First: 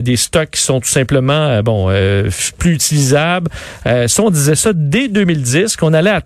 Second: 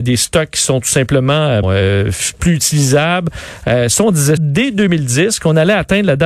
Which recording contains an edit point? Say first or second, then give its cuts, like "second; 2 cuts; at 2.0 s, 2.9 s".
second; 2 cuts; at 1.6 s, 4.4 s